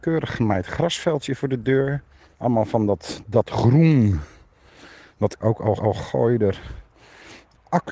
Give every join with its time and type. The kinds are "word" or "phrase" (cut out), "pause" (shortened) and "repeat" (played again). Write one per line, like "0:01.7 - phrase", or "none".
0:02.2 - pause
0:05.4 - phrase
0:05.8 - repeat